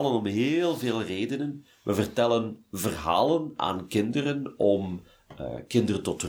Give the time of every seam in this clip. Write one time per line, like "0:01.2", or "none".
none